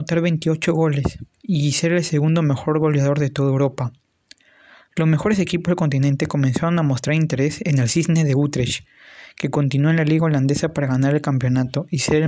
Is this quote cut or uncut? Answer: uncut